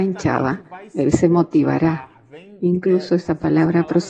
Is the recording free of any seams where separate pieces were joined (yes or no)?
yes